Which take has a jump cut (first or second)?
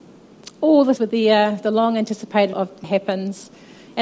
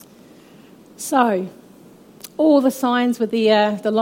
first